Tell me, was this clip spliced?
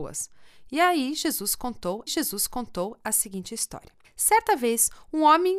yes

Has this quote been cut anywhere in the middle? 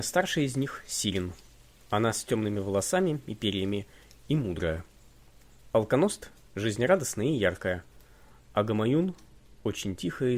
no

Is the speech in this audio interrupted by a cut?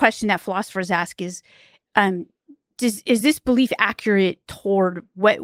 no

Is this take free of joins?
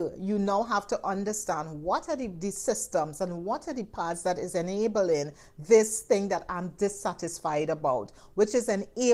yes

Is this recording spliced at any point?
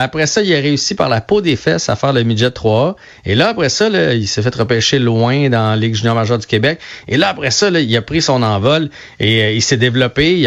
no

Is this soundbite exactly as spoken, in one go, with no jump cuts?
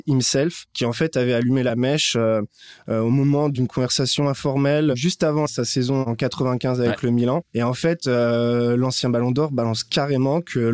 yes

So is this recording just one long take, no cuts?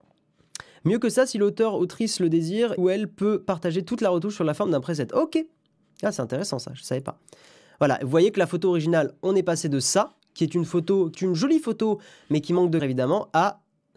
no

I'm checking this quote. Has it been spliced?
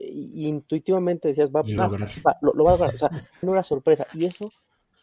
yes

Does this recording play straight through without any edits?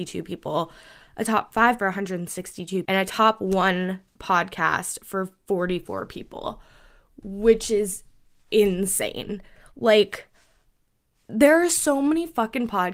no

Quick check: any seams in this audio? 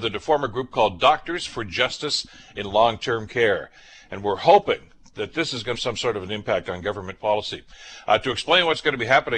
yes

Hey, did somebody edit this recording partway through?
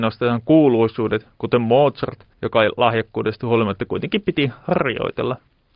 yes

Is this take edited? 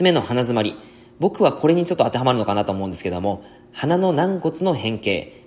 no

